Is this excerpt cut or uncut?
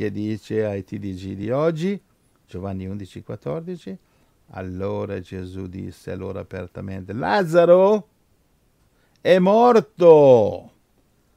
uncut